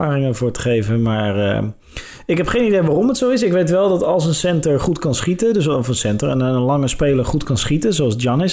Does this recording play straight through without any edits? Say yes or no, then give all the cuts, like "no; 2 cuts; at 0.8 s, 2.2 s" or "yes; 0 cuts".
yes; 0 cuts